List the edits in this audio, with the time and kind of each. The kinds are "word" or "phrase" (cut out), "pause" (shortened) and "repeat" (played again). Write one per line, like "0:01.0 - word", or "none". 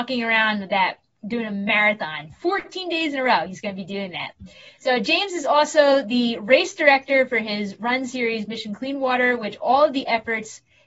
none